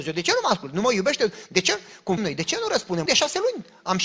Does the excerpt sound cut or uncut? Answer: cut